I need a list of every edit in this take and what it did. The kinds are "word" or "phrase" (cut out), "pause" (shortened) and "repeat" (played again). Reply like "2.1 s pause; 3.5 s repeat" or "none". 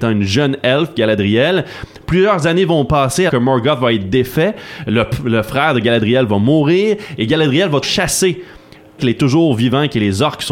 3.3 s word; 7.8 s word; 9.0 s phrase